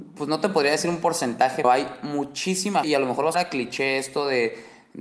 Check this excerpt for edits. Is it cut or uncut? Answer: cut